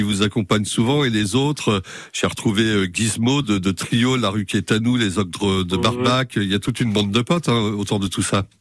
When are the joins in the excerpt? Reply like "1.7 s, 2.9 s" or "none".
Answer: none